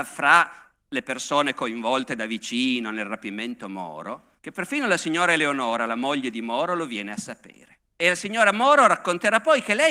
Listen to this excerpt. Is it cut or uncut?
cut